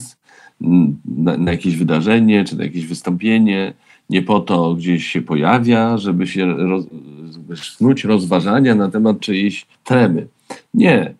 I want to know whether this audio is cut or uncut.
cut